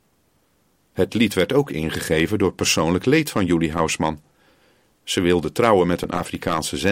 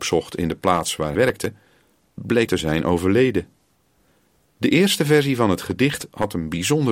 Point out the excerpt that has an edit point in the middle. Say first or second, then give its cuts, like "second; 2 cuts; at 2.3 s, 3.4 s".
second; 2 cuts; at 1.1 s, 2.5 s